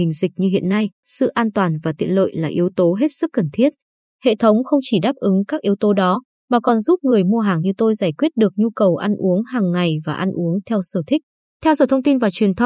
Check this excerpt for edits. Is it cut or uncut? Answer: uncut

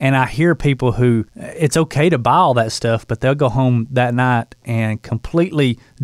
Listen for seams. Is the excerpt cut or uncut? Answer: cut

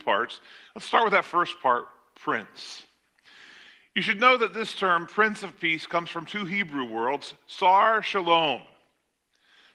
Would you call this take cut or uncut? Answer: uncut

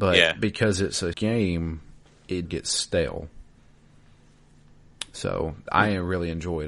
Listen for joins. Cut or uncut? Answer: cut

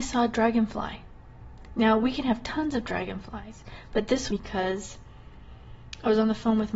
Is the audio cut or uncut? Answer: cut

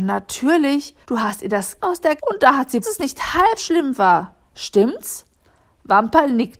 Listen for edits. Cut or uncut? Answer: cut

